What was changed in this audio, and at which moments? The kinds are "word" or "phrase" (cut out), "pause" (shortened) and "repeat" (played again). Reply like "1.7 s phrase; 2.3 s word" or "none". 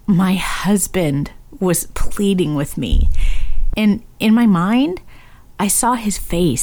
none